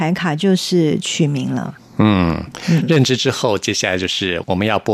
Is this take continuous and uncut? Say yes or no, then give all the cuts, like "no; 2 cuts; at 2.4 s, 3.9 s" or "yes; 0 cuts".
yes; 0 cuts